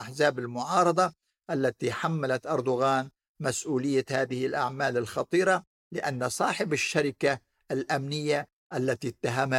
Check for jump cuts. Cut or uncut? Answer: uncut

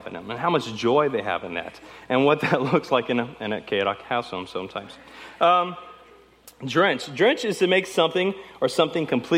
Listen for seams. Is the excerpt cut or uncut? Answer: uncut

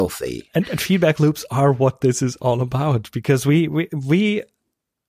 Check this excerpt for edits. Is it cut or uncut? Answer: uncut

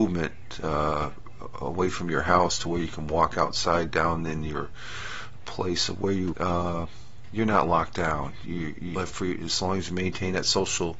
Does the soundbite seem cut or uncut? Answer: cut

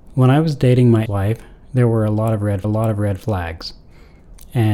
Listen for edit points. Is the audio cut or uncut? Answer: cut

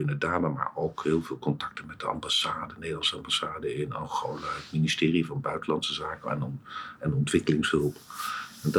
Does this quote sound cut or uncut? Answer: uncut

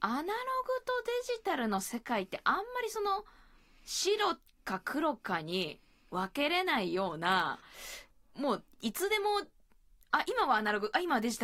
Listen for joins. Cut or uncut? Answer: uncut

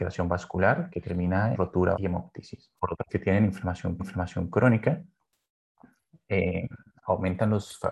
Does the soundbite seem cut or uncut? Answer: cut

